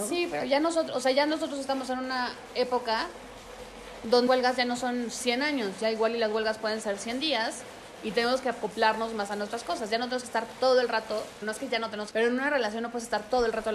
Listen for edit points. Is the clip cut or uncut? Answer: cut